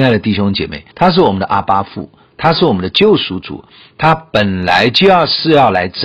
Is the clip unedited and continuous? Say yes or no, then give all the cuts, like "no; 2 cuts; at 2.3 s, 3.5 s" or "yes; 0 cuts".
no; 1 cut; at 0.9 s